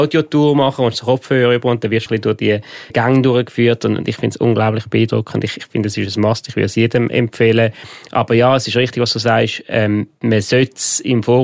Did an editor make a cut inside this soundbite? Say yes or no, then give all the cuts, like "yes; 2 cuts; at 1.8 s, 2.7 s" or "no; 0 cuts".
yes; 2 cuts; at 2.1 s, 2.9 s